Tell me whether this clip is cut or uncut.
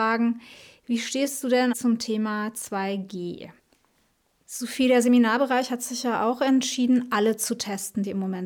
cut